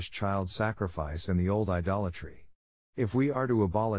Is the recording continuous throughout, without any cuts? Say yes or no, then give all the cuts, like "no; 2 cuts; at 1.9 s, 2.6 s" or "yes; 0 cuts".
yes; 0 cuts